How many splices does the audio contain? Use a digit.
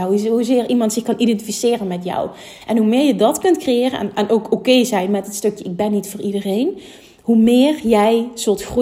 0